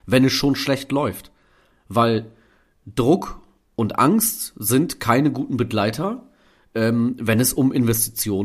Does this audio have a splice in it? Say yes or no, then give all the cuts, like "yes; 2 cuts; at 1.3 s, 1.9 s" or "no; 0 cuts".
no; 0 cuts